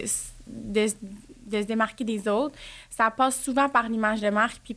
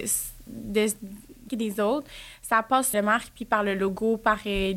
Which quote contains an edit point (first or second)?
second